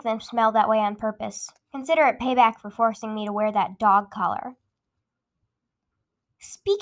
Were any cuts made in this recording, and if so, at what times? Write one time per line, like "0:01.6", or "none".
none

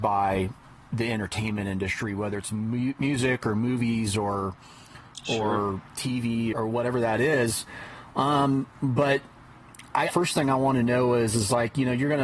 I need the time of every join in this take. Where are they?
0:06.5
0:10.1

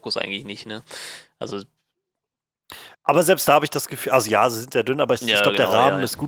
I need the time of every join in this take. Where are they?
0:02.9

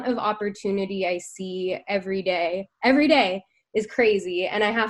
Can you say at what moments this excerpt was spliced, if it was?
none

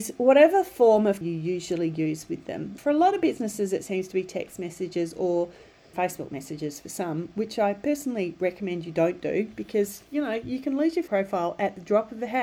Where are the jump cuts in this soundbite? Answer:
0:01.2
0:02.8
0:05.9
0:11.1

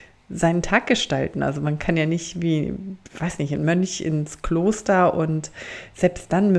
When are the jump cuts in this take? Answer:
none

